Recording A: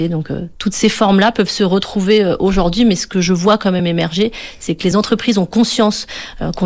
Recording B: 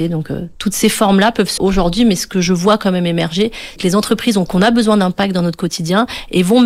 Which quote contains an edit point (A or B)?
B